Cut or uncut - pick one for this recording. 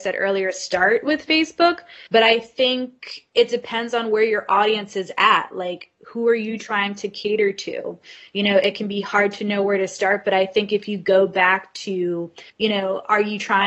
cut